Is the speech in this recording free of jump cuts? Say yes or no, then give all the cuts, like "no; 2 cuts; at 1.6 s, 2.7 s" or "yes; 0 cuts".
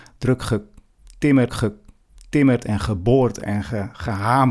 no; 1 cut; at 1.5 s